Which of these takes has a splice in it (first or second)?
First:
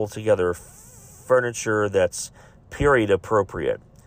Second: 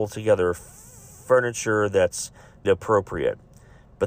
second